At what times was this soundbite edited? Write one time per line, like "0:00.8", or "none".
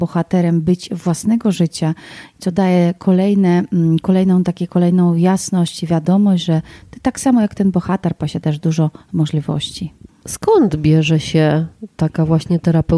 none